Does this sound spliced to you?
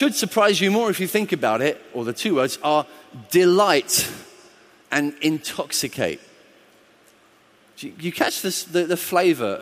no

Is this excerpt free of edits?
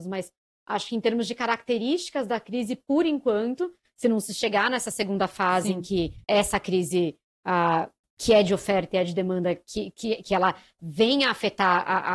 no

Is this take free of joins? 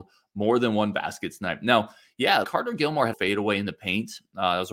no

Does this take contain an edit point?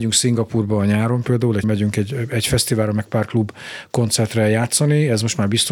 yes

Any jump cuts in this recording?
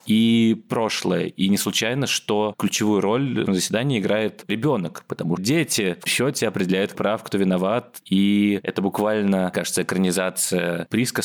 yes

